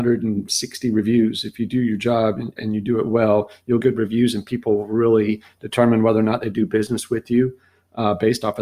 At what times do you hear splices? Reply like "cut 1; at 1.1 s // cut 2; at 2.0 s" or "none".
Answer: cut 1; at 2.6 s // cut 2; at 3.8 s